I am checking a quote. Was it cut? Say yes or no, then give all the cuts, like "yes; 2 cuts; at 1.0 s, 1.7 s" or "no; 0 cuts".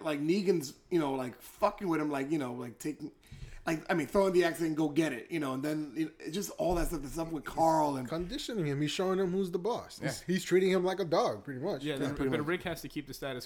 no; 0 cuts